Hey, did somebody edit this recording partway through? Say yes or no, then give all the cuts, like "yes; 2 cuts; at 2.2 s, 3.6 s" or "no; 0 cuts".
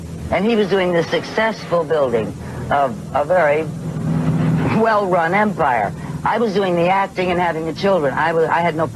no; 0 cuts